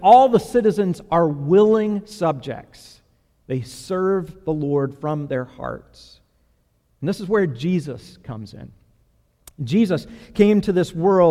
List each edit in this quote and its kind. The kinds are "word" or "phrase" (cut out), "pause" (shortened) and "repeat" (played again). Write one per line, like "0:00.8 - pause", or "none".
none